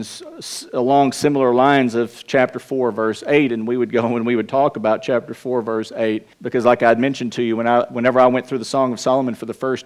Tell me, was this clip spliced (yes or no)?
yes